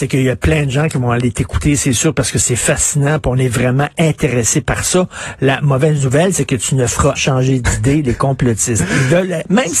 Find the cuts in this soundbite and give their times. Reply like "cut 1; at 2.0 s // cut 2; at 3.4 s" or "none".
cut 1; at 7.2 s